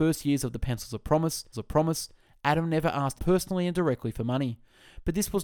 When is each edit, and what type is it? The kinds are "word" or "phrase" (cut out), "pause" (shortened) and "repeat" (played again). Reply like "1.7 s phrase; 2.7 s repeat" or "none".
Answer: 1.5 s repeat; 3.2 s word

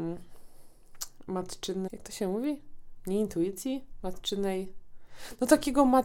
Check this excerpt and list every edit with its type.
1.9 s word

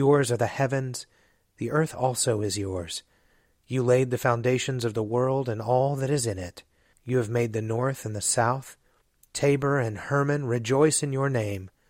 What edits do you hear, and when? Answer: 6.9 s pause

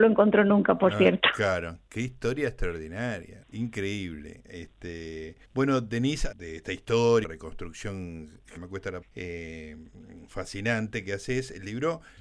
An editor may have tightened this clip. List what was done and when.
3.4 s word; 5.4 s pause; 6.3 s phrase; 7.2 s word; 8.6 s word; 9.0 s word

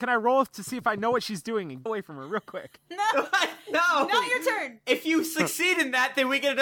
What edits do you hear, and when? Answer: 1.9 s word

